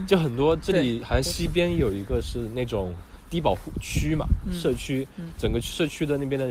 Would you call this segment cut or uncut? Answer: uncut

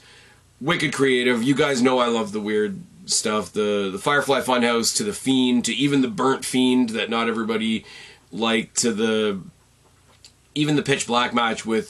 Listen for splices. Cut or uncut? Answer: uncut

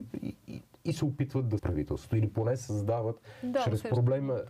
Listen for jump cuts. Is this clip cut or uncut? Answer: cut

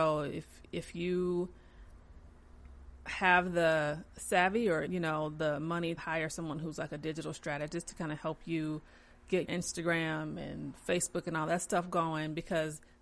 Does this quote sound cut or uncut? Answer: cut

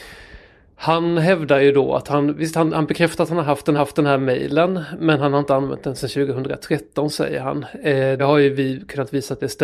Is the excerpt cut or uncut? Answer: cut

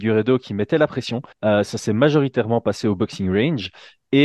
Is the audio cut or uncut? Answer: cut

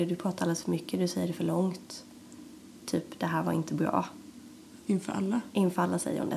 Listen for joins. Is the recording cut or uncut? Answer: uncut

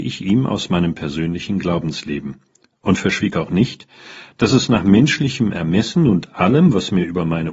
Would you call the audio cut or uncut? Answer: uncut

